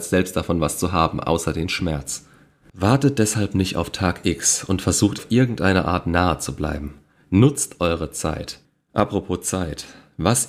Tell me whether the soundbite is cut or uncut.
cut